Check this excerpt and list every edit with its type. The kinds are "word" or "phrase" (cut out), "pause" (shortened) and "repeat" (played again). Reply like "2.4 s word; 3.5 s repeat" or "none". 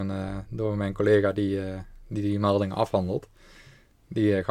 none